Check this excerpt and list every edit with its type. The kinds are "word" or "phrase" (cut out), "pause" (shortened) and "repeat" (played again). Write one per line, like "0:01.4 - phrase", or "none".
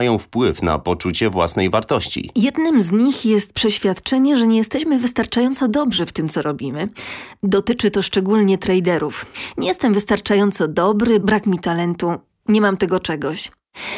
none